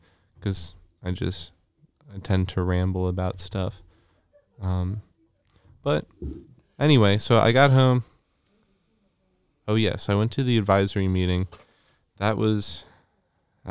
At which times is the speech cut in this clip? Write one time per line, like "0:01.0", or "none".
none